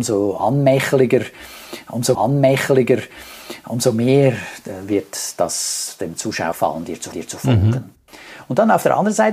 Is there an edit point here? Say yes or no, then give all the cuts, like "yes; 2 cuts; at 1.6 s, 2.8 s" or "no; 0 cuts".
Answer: yes; 3 cuts; at 2.1 s, 6.5 s, 7.1 s